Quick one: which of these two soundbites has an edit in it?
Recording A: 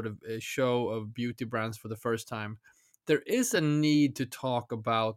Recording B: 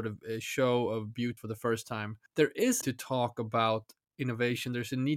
B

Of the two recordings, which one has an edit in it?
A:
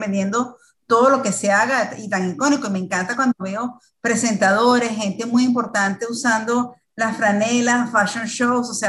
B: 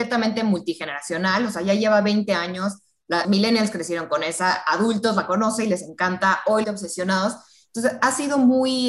B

